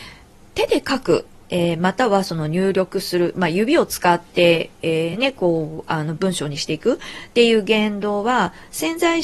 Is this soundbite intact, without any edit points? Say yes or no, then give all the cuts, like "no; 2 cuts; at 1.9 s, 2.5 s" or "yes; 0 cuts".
yes; 0 cuts